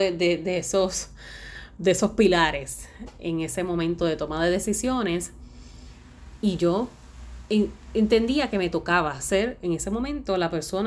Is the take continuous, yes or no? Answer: yes